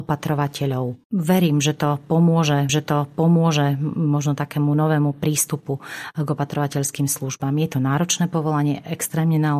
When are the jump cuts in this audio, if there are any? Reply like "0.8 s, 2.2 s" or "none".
1.0 s, 2.7 s